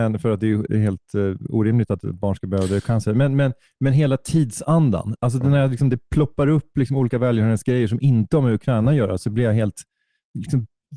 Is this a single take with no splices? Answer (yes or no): yes